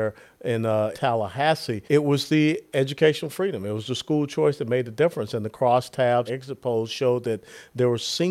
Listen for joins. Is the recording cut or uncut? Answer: cut